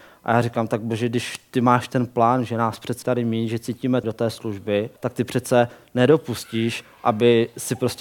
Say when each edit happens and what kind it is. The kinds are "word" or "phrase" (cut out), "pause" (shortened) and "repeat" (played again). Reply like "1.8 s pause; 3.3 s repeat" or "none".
3.0 s word; 4.0 s phrase; 5.0 s pause